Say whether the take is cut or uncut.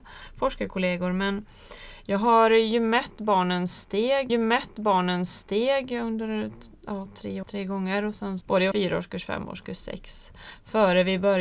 cut